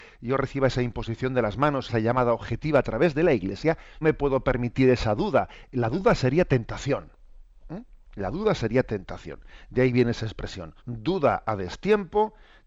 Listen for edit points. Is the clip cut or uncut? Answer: cut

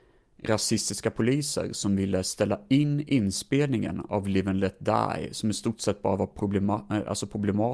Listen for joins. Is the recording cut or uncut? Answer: uncut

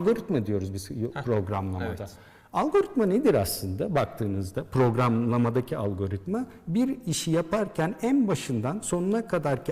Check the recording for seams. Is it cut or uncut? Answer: uncut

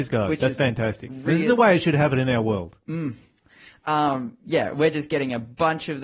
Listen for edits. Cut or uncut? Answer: uncut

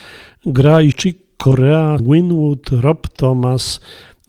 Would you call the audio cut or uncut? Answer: cut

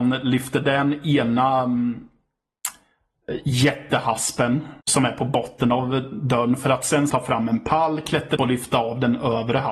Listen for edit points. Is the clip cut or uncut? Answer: cut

